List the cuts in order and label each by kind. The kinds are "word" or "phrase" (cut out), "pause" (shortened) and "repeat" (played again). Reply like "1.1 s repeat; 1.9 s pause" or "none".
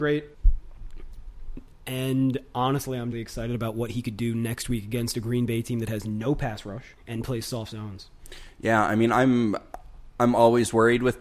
3.1 s phrase

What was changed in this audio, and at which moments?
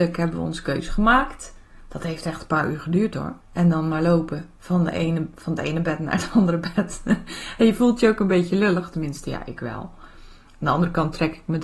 3.4 s pause

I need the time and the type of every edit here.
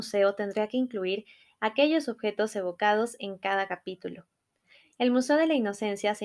none

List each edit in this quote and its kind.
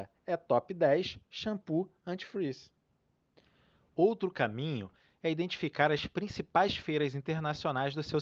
none

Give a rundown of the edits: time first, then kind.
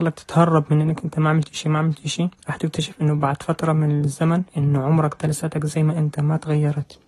2.4 s pause; 4.5 s pause; 5.2 s phrase

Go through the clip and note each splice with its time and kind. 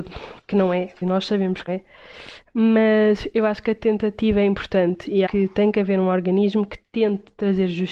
1.0 s word; 1.7 s word; 5.3 s word

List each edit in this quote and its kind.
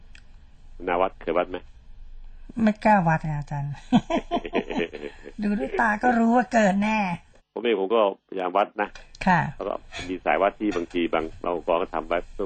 7.4 s pause

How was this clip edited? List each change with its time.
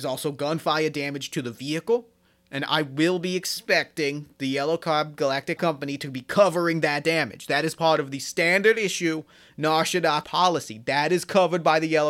5.6 s phrase; 10.2 s word

